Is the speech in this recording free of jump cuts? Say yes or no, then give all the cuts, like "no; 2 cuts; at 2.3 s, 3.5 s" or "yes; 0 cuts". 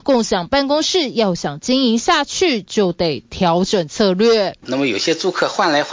no; 1 cut; at 4.6 s